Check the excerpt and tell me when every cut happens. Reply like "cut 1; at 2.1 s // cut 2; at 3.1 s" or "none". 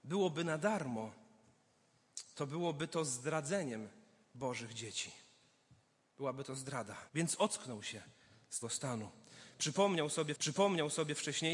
cut 1; at 7.1 s // cut 2; at 8.6 s // cut 3; at 10.3 s